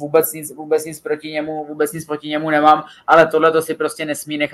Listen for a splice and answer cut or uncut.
uncut